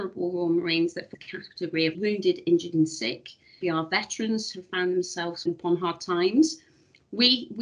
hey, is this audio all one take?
no; 4 cuts; at 1.1 s, 1.9 s, 3.6 s, 5.5 s

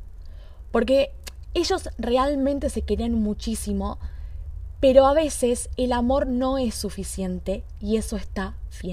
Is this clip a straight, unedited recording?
yes; 0 cuts

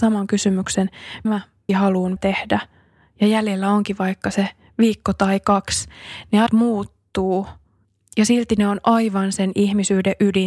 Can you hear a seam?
yes; 4 cuts; at 1.2 s, 1.7 s, 2.2 s, 6.5 s

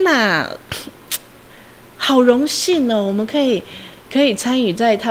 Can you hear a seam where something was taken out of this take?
no; 0 cuts

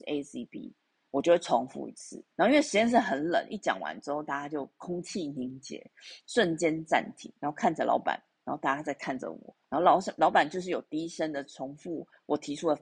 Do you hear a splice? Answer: yes; 3 cuts; at 2.3 s, 7.4 s, 9.6 s

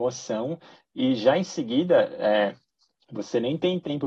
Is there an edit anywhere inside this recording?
no; 0 cuts

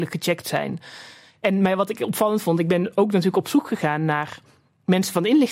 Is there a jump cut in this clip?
no; 0 cuts

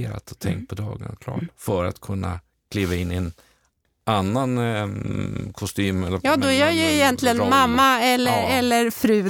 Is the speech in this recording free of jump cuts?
yes; 0 cuts

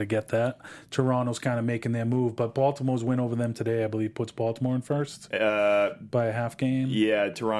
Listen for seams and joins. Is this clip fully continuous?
yes; 0 cuts

